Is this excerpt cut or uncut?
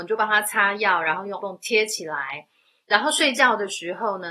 cut